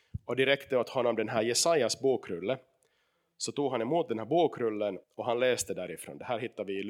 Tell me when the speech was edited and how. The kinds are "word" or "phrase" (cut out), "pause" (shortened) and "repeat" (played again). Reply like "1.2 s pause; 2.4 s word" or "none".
5.0 s pause